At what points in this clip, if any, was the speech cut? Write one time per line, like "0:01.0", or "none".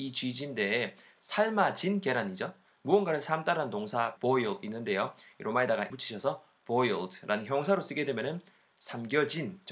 0:04.2
0:05.9